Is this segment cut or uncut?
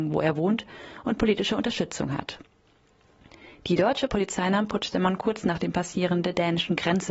uncut